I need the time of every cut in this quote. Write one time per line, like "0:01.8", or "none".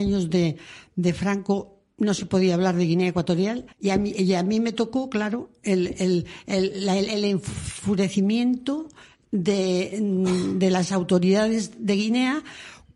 0:03.7